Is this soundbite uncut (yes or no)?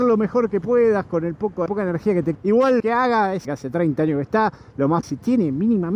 no